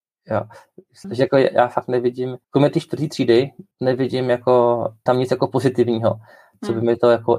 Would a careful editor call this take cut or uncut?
cut